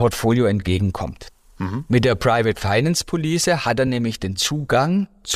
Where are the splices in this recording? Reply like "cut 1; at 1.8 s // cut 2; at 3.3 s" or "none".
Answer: none